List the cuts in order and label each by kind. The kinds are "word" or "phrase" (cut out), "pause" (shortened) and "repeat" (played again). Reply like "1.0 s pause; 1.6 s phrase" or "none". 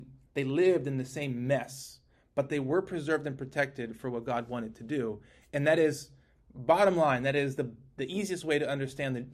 none